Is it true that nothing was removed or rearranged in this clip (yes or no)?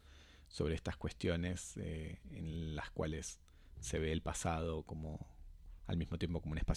yes